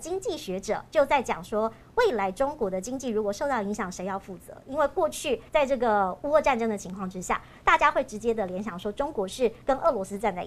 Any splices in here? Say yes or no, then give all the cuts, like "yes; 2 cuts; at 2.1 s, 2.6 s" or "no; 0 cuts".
yes; 1 cut; at 5.5 s